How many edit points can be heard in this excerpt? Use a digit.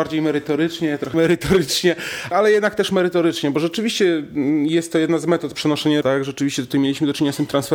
3